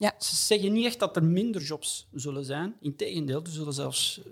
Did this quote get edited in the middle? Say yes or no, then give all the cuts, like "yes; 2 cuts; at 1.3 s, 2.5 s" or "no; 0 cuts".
no; 0 cuts